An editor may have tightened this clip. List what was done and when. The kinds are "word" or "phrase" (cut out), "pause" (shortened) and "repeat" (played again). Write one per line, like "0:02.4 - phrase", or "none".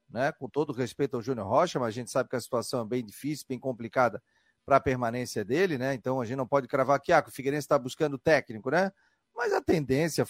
none

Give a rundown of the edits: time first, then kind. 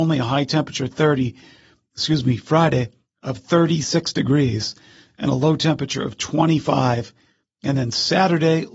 none

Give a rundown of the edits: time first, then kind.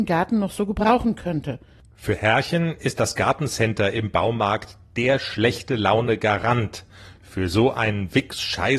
none

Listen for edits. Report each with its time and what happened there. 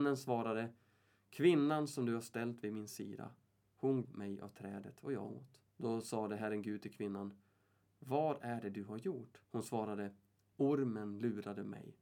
0:04.0 - word
0:05.7 - pause
0:09.4 - pause

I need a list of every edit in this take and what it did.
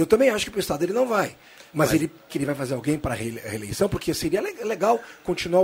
0:01.7 - pause
0:02.3 - word

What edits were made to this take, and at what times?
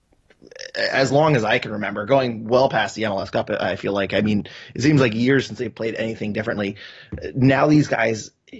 none

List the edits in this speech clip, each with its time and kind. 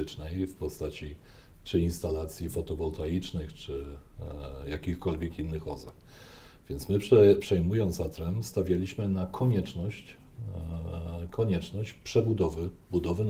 none

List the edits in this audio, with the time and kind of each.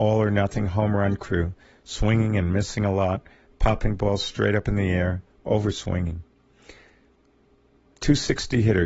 none

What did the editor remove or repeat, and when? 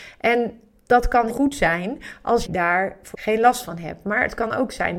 0:01.3 - word
0:02.4 - word
0:03.1 - word

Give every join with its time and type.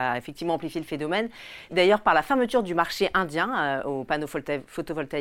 0:01.7 - word

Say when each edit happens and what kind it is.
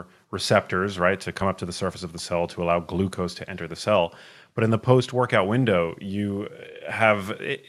none

